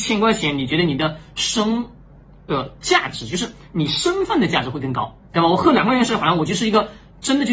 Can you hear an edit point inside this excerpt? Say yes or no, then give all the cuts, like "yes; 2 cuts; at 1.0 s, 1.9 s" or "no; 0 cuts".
no; 0 cuts